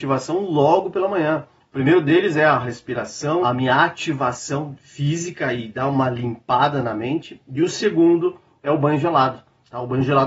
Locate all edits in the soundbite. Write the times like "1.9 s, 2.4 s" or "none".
3.4 s